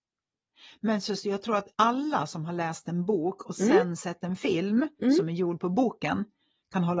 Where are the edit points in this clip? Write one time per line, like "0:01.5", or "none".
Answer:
0:01.7